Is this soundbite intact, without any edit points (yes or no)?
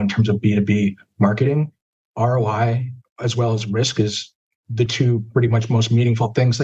yes